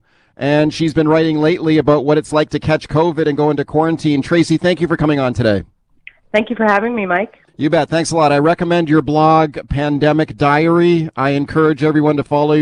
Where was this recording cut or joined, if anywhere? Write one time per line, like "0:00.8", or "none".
0:05.9
0:07.5